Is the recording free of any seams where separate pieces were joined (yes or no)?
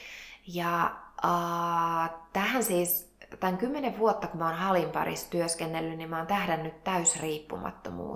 yes